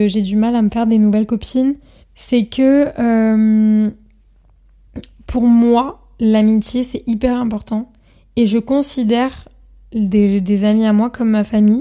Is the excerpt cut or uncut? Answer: cut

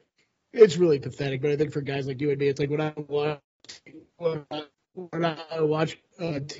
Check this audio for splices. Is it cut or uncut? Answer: uncut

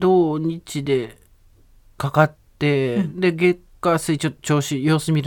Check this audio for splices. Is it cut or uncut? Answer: uncut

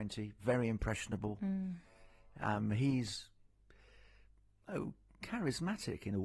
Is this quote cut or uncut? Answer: uncut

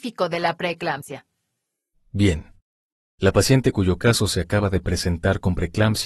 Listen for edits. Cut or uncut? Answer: uncut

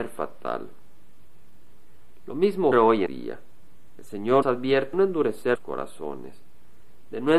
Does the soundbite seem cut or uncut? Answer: cut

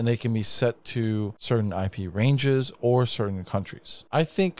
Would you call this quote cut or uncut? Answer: uncut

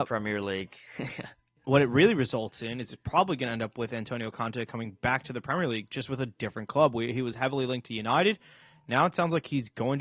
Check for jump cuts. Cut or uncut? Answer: uncut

